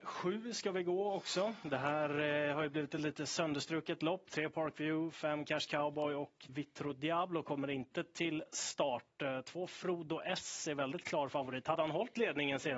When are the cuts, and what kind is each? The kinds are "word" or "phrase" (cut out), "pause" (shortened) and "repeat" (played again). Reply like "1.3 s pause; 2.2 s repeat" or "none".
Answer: 6.5 s word